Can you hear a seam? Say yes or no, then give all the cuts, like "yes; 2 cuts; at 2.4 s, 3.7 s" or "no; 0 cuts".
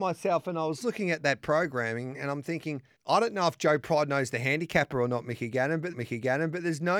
yes; 2 cuts; at 3.0 s, 5.9 s